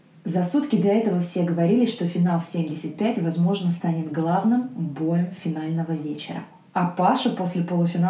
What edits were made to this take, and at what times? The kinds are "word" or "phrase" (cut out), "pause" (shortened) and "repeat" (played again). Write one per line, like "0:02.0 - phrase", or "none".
none